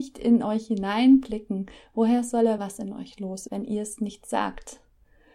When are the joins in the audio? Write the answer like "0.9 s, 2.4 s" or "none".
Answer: 2.6 s, 3.5 s